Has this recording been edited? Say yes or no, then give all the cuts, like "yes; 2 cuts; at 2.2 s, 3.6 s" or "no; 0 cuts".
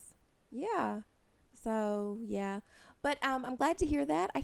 no; 0 cuts